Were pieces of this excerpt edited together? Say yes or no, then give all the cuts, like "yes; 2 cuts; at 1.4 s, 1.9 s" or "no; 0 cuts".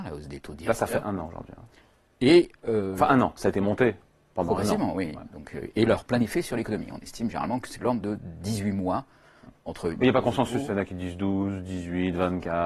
no; 0 cuts